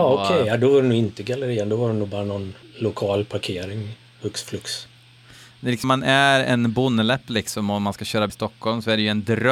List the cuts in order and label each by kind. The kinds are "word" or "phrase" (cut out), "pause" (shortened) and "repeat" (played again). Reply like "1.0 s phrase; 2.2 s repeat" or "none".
2.6 s pause; 5.8 s word; 8.3 s word